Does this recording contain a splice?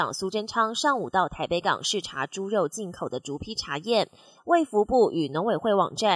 no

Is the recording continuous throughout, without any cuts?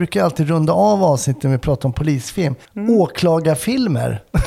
no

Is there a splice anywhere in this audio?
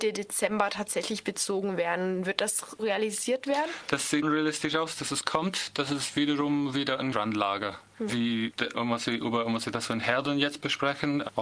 yes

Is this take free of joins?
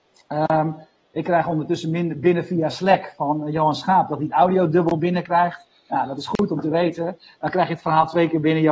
yes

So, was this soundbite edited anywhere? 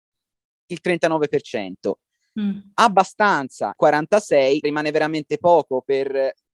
yes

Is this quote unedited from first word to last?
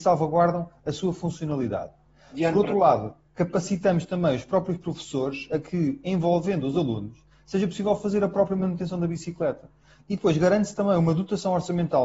yes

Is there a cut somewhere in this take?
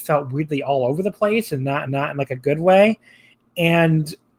yes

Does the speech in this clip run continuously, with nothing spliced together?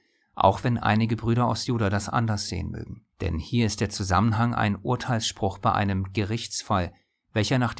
no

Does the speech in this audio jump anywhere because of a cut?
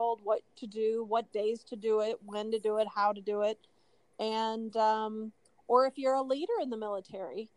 no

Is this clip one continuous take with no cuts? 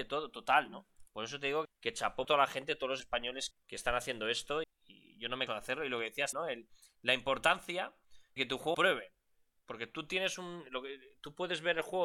no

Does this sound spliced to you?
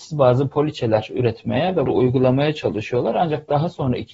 yes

